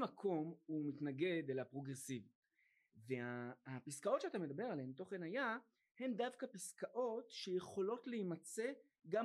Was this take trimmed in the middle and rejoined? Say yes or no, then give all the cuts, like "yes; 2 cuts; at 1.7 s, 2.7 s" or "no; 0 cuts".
no; 0 cuts